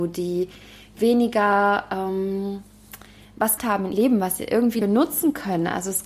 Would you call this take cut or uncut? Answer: cut